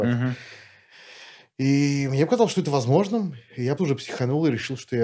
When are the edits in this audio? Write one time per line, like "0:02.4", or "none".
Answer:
0:03.8